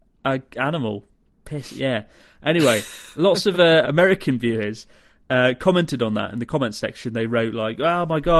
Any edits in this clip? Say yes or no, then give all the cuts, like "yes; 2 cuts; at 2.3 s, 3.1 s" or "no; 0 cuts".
yes; 1 cut; at 3.8 s